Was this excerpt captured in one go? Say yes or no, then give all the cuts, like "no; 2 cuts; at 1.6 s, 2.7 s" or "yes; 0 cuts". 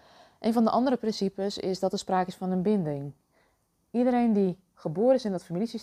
yes; 0 cuts